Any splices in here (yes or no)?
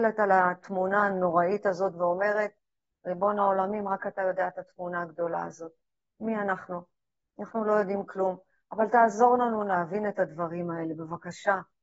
no